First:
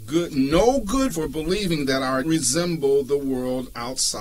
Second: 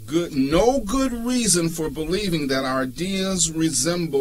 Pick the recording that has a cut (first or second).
first